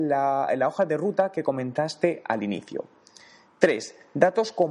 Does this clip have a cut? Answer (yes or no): no